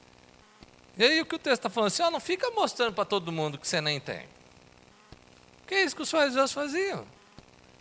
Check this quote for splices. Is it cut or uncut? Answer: uncut